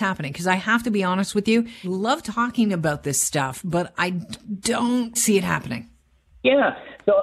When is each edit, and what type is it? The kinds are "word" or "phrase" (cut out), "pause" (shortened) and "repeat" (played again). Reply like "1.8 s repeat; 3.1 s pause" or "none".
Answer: 1.8 s word; 5.2 s word